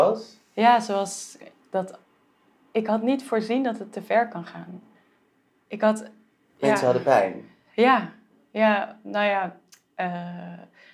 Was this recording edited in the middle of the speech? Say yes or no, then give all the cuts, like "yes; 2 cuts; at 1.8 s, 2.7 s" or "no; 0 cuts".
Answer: no; 0 cuts